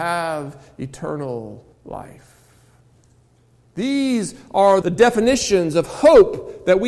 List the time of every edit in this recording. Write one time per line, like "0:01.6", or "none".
0:01.7
0:04.8